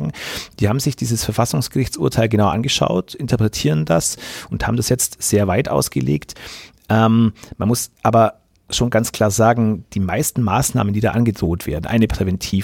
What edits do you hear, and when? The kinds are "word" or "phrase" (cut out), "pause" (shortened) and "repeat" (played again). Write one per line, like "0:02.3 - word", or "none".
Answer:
none